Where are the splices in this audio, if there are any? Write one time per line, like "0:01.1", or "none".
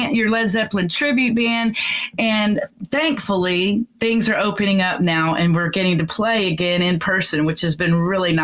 0:03.9